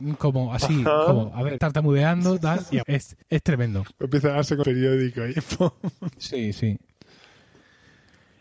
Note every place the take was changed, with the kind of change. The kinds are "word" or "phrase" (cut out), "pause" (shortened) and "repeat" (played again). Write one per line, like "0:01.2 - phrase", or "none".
0:01.6 - phrase
0:02.8 - word
0:03.2 - pause
0:04.6 - word

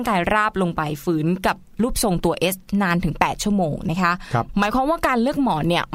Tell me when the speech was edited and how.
none

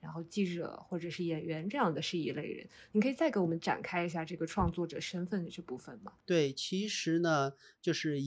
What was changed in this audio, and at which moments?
0:06.2 - pause

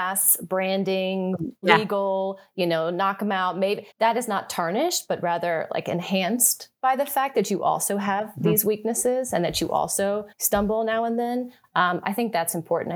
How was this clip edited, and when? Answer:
0:03.9 - pause
0:10.3 - pause

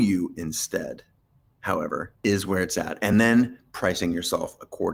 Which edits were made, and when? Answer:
none

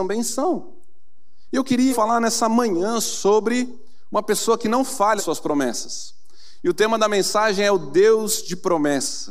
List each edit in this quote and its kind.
0:01.9 - word
0:05.2 - word

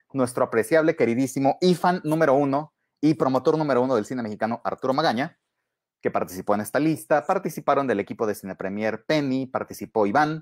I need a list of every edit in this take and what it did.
none

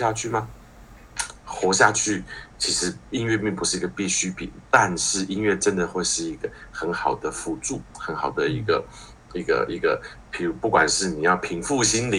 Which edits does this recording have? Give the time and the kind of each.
0:07.9 - pause

